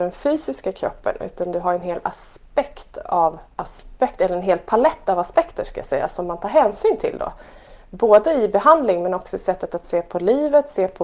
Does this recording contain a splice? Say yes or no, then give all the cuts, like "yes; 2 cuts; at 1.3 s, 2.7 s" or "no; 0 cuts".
no; 0 cuts